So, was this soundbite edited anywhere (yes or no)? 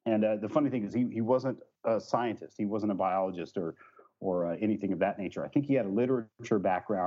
no